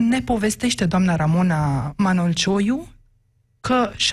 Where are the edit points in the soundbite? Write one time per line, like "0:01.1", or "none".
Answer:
none

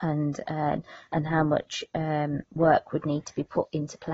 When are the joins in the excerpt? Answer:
none

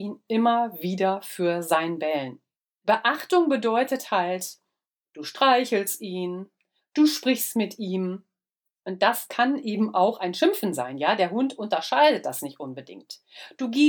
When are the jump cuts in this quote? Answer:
none

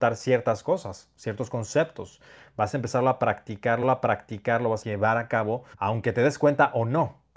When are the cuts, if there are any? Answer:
0:03.8
0:04.8
0:05.7

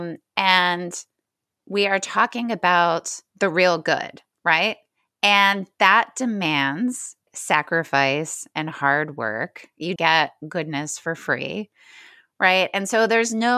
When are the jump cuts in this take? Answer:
0:03.3
0:07.3
0:10.0

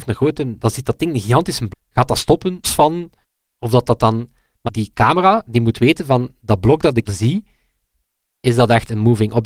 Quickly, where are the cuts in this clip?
0:01.7
0:02.6
0:03.2
0:04.7
0:07.1

